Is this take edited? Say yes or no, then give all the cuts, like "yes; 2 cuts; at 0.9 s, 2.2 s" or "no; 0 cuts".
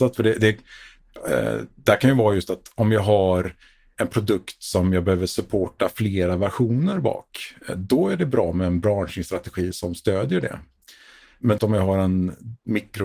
yes; 1 cut; at 11.6 s